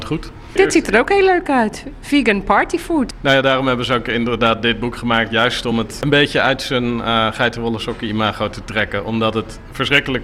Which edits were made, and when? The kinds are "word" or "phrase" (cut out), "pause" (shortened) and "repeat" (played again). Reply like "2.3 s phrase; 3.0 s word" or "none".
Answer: none